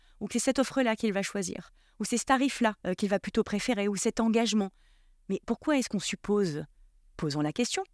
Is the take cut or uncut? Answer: cut